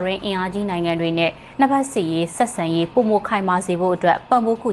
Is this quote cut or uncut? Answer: cut